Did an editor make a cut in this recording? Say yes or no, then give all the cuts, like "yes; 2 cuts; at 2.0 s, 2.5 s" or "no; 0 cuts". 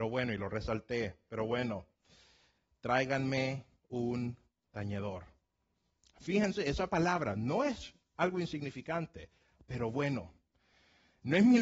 no; 0 cuts